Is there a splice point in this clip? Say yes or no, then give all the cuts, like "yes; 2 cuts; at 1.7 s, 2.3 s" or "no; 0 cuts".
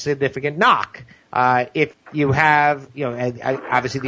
yes; 1 cut; at 1.9 s